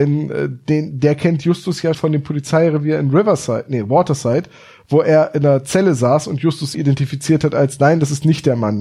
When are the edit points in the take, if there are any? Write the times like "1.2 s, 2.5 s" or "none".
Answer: 1.9 s, 6.7 s